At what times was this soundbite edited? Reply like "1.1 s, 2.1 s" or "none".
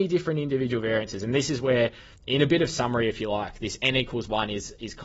2.2 s